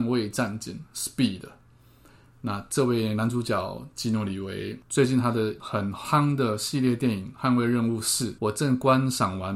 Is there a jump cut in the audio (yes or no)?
no